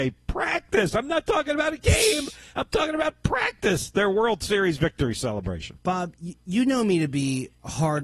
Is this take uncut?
yes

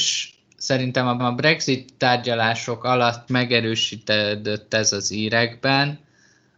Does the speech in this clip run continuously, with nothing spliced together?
no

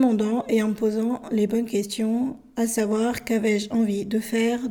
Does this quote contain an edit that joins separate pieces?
no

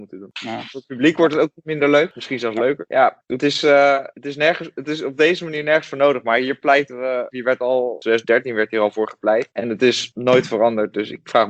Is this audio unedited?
yes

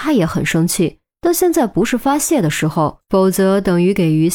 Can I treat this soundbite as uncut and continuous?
no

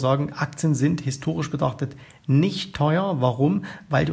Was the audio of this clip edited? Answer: no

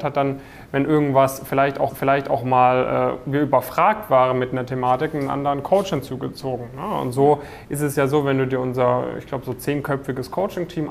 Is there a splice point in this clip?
yes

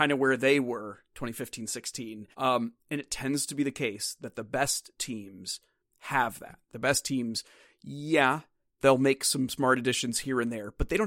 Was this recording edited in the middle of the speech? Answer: yes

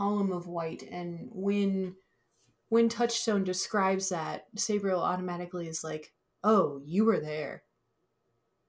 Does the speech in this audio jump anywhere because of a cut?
no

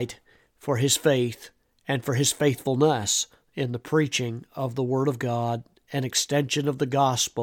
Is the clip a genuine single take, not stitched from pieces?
yes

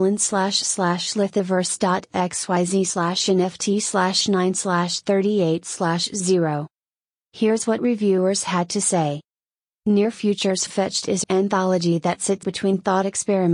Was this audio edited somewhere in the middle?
yes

